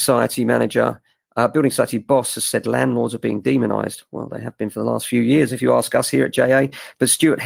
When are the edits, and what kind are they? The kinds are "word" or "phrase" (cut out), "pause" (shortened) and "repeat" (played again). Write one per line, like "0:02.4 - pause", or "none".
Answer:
none